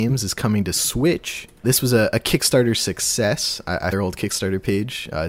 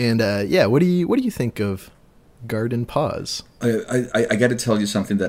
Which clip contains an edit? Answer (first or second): first